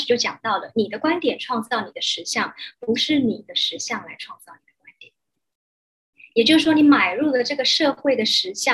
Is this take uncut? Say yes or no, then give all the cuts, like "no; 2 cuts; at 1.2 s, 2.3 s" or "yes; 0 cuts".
yes; 0 cuts